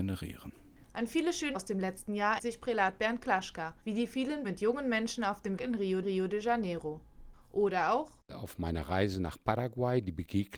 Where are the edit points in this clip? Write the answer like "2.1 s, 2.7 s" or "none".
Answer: 1.5 s, 2.4 s, 3.8 s, 4.4 s, 5.6 s, 6.0 s, 8.2 s